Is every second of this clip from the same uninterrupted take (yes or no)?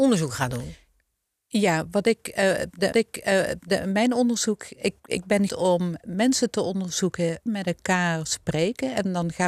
no